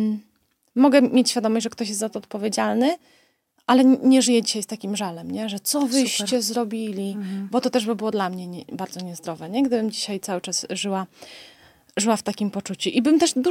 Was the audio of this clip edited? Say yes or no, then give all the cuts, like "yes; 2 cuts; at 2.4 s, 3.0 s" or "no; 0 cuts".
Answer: no; 0 cuts